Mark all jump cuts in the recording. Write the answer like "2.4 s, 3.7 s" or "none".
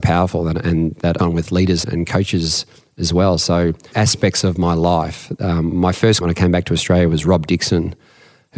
1.2 s, 1.8 s, 3.9 s, 6.2 s